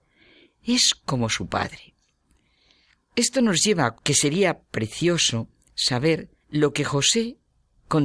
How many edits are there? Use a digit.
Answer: 2